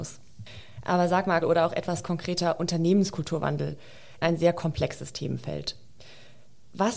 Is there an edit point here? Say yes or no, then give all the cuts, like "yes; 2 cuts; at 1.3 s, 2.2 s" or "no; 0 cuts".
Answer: yes; 2 cuts; at 1.4 s, 4.2 s